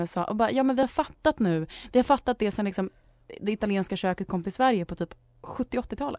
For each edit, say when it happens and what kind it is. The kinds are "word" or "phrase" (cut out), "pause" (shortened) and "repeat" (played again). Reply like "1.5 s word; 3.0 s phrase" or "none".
none